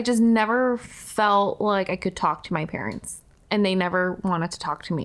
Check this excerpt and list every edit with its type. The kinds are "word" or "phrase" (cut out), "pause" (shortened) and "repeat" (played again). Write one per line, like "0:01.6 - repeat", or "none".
0:03.3 - pause